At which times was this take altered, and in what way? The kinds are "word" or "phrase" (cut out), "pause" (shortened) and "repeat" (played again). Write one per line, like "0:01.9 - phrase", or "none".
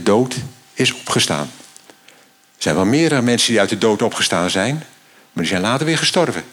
none